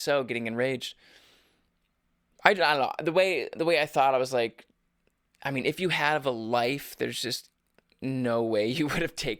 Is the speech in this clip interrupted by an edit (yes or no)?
no